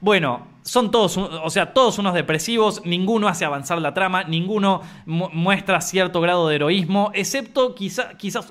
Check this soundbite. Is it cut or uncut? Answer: uncut